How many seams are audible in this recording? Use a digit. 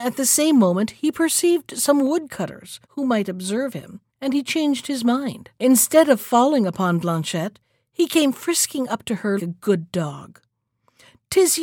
4